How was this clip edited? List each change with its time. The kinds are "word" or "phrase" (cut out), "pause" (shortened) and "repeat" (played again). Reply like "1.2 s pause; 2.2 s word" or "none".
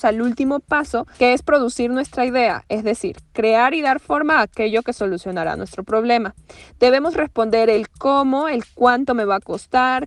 none